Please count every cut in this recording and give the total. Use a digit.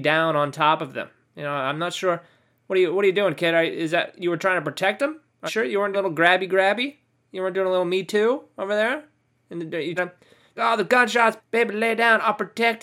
5